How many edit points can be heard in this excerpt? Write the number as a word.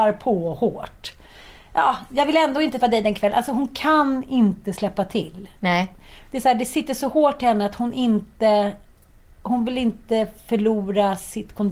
one